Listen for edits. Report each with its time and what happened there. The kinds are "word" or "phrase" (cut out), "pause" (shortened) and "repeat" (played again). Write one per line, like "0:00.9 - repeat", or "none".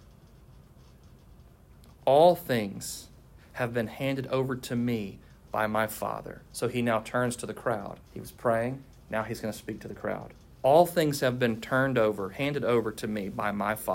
0:06.5 - pause
0:08.0 - pause
0:10.5 - pause